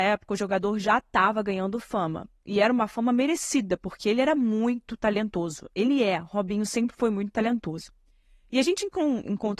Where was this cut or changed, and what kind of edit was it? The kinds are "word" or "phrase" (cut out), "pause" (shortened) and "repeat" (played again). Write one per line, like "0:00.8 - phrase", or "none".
none